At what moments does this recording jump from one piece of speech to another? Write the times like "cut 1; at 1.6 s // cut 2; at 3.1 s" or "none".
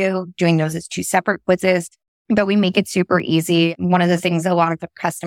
none